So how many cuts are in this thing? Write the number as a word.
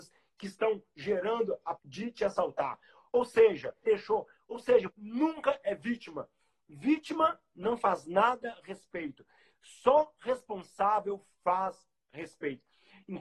three